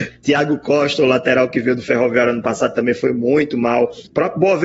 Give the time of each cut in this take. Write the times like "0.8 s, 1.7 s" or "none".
none